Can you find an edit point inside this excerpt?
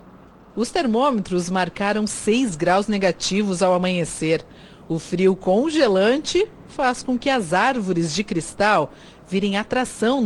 no; 0 cuts

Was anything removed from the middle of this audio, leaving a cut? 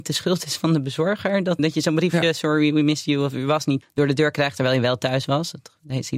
yes; 2 cuts; at 1.6 s, 3.8 s

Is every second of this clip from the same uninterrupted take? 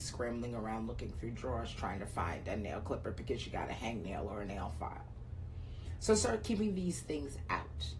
yes; 0 cuts

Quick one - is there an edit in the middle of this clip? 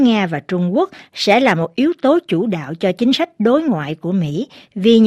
no; 0 cuts

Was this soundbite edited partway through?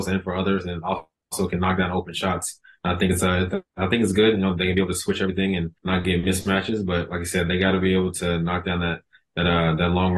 yes; 2 cuts; at 3.7 s, 5.8 s

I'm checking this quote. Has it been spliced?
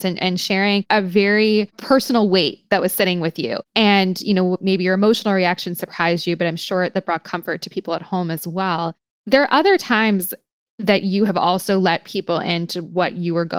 no; 0 cuts

